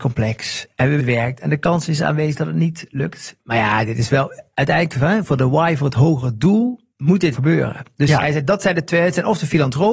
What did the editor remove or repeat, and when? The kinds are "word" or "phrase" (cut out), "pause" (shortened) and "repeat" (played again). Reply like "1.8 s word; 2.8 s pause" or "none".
1.0 s phrase; 3.4 s pause; 6.9 s pause; 7.3 s word